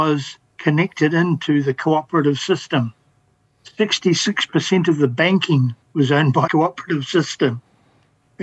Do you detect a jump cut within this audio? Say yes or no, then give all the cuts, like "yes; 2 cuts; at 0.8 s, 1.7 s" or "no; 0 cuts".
yes; 2 cuts; at 5.8 s, 6.5 s